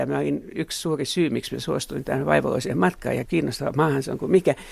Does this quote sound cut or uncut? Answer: cut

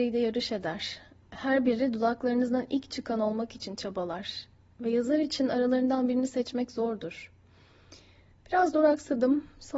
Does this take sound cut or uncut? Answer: uncut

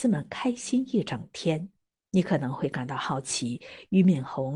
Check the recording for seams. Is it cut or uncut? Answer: cut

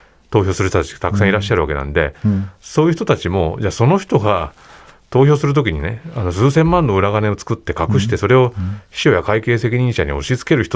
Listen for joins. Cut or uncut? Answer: uncut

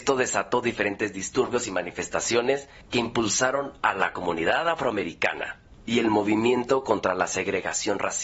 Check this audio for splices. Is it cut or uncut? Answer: uncut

